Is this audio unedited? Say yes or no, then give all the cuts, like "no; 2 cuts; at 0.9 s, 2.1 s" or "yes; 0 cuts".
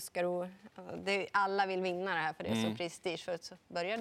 yes; 0 cuts